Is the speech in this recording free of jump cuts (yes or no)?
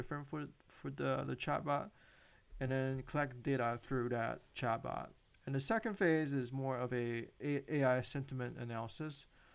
yes